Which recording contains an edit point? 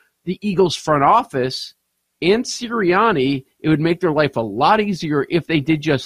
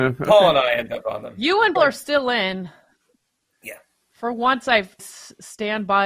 second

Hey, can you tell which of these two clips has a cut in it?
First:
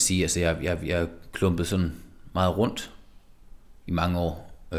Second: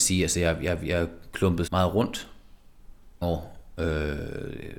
second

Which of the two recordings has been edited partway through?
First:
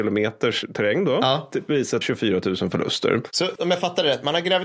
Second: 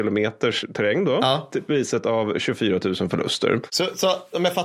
first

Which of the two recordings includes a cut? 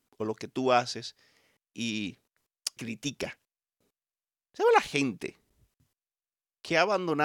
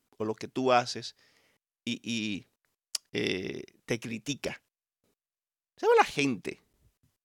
first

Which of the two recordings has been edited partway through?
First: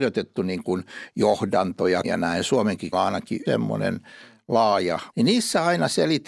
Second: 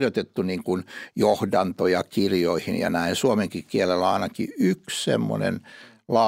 first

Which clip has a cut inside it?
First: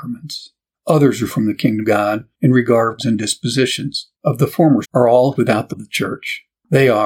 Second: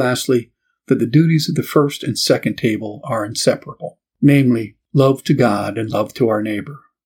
first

